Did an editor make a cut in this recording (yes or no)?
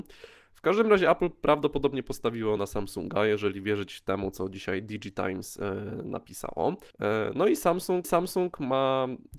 yes